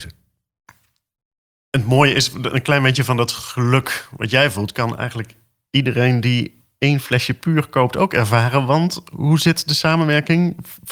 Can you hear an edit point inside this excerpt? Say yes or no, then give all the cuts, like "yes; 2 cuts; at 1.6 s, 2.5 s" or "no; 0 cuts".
no; 0 cuts